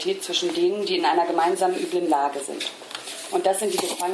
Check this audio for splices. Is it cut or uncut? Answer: uncut